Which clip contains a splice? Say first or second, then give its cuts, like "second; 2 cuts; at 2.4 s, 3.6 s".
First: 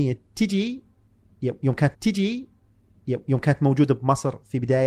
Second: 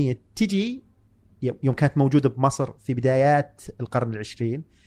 first; 1 cut; at 1.9 s